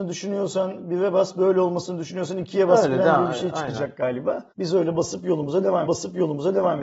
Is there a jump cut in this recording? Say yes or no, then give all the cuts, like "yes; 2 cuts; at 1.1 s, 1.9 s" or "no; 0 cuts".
yes; 2 cuts; at 4.5 s, 5.9 s